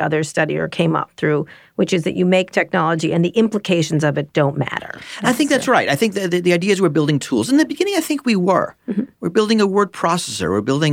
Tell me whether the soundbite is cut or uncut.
uncut